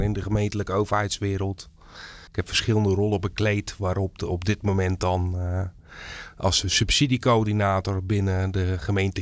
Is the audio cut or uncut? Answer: cut